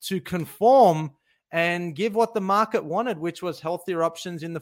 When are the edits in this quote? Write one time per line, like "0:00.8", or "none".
none